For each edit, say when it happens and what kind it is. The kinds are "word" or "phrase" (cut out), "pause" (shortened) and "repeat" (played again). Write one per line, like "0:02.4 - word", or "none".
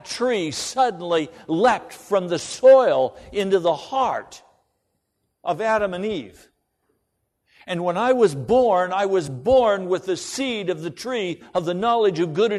none